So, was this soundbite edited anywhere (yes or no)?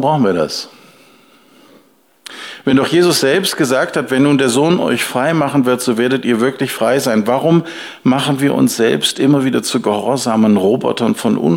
no